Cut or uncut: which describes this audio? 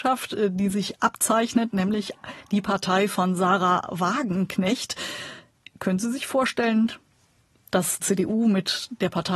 cut